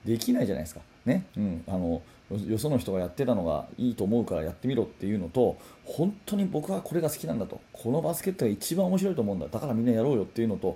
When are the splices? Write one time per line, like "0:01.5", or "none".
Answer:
0:01.3
0:07.7